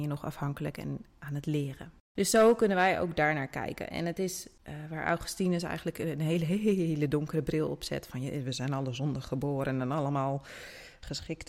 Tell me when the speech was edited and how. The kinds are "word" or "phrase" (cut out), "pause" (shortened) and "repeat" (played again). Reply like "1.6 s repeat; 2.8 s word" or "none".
2.0 s pause; 4.6 s pause